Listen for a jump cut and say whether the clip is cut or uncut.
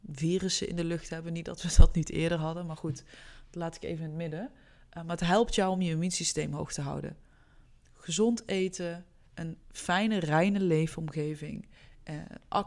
uncut